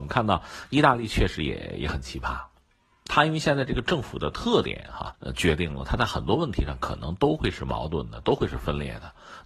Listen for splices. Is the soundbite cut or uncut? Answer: cut